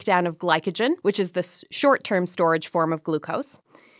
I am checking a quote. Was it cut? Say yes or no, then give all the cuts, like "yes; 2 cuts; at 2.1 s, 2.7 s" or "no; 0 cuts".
yes; 1 cut; at 1.0 s